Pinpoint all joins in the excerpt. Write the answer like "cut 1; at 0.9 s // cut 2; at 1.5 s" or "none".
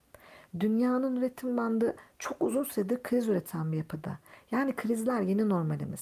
none